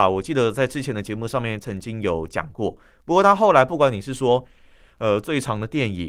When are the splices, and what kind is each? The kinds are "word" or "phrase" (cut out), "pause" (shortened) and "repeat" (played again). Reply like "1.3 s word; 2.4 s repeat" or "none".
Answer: none

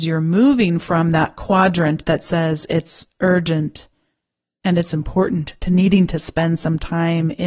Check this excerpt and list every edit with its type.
none

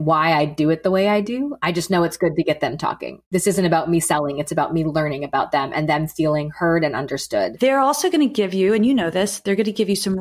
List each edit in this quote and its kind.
none

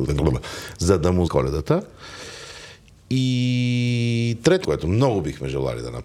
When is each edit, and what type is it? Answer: 1.3 s word; 4.6 s word

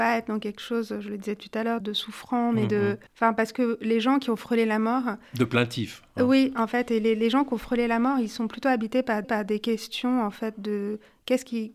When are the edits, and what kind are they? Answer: 1.8 s word; 3.1 s pause; 9.2 s repeat

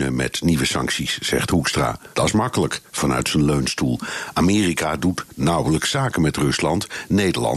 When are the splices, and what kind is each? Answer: 2.1 s pause

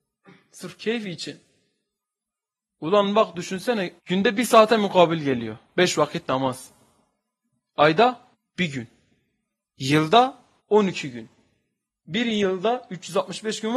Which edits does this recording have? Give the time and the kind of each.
4.0 s pause; 8.3 s pause; 10.6 s pause

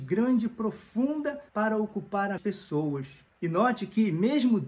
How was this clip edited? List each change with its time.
1.5 s pause; 2.4 s phrase; 3.3 s pause

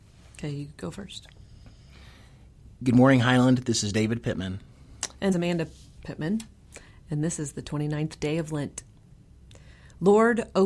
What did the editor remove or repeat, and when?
5.3 s phrase

